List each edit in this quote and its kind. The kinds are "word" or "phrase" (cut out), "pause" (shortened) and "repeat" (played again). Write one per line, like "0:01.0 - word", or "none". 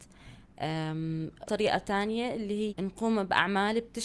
0:01.5 - word
0:02.7 - word